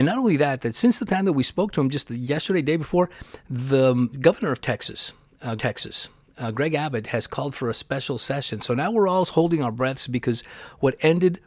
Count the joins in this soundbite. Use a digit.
2